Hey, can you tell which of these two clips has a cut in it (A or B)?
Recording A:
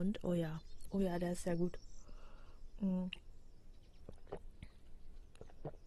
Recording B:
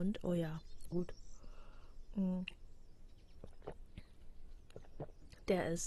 B